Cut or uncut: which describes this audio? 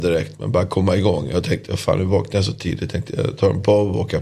uncut